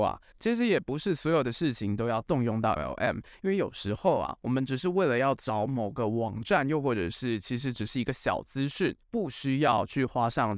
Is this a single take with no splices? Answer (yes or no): no